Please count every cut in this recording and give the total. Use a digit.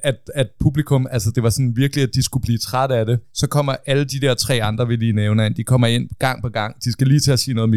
1